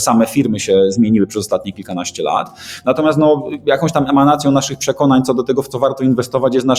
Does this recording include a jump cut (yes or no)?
no